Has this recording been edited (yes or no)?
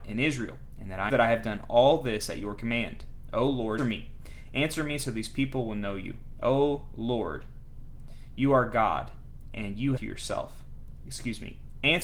yes